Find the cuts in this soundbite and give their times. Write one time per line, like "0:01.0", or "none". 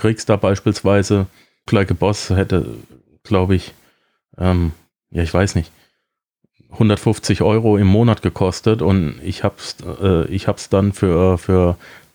0:01.7

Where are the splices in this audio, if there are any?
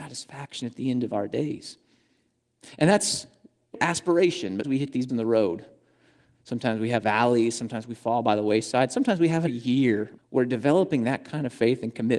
0:03.7
0:04.6
0:05.1
0:07.0
0:09.5
0:10.2

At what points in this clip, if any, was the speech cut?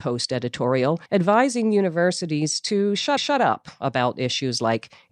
0:01.1
0:03.2

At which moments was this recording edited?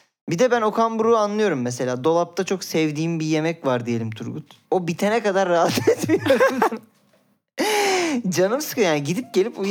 0:04.6
0:06.7

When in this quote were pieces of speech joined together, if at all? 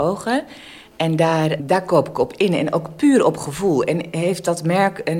0:01.6

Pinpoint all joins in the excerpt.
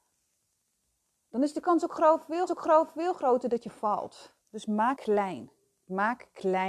0:02.5
0:04.4
0:05.0

